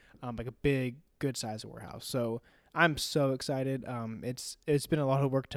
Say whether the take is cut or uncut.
uncut